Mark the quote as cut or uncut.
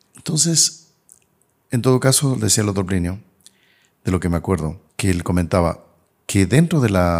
cut